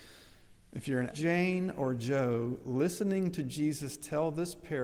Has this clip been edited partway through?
yes; 1 cut; at 1.1 s

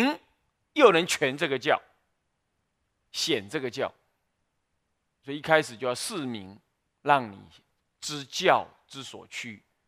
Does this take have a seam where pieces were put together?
no; 0 cuts

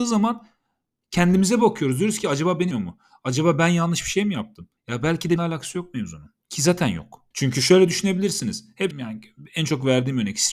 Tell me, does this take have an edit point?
yes; 6 cuts; at 2.7 s, 4.8 s, 5.4 s, 6.4 s, 7.3 s, 8.9 s

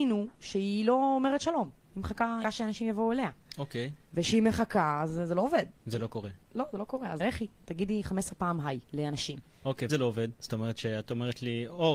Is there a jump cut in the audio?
yes; 5 cuts; at 2.4 s, 4.0 s, 7.2 s, 8.8 s, 9.9 s

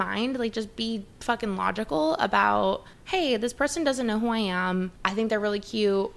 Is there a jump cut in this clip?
yes; 2 cuts; at 2.9 s, 5.0 s

